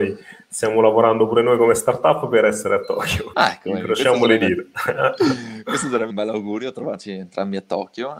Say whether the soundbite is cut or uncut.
cut